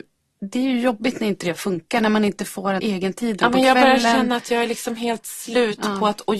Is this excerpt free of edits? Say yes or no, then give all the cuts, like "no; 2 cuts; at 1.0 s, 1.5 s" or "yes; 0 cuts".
no; 1 cut; at 2.8 s